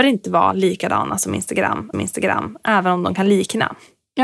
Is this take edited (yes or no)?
yes